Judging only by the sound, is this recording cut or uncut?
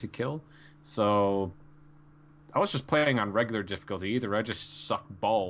uncut